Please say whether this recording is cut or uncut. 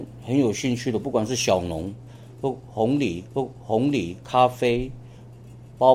cut